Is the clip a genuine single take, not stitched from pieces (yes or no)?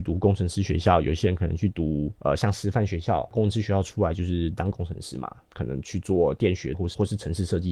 no